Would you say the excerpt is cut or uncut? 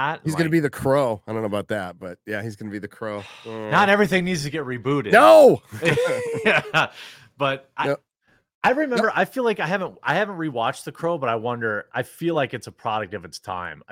uncut